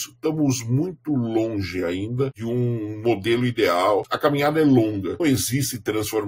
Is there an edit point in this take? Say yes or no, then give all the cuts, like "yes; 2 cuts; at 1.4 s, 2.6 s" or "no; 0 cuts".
yes; 1 cut; at 5.2 s